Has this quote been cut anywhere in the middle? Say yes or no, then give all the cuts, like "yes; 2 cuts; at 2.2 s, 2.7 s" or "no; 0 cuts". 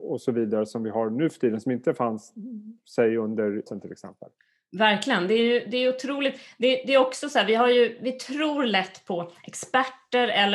yes; 1 cut; at 3.7 s